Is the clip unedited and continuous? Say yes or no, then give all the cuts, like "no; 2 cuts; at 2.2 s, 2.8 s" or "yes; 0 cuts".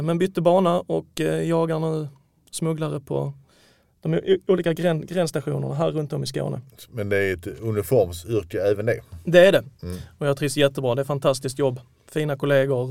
yes; 0 cuts